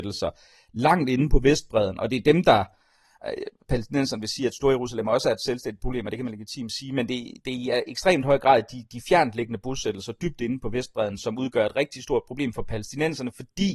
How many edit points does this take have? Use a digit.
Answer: 0